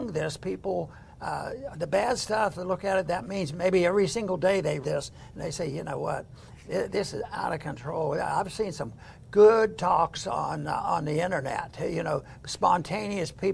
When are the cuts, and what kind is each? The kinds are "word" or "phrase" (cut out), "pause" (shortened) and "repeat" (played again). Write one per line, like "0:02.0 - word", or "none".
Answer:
0:04.8 - word